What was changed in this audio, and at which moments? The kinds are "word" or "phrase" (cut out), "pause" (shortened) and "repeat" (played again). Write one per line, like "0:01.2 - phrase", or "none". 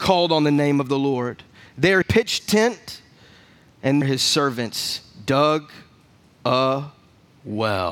0:02.0 - word
0:02.4 - word
0:04.0 - word

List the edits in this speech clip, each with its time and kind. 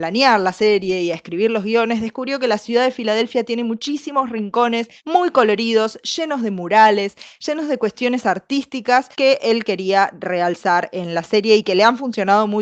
0:05.0 - pause
0:09.1 - pause

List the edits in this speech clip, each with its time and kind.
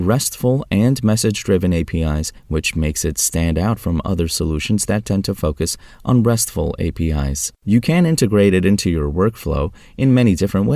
0:02.4 - pause
0:07.6 - pause

